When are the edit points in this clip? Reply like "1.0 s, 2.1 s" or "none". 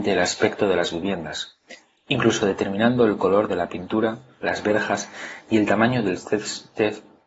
none